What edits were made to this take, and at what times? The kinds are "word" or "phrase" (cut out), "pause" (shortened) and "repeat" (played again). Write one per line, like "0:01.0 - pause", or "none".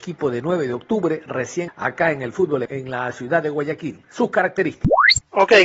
0:01.7 - word
0:02.7 - word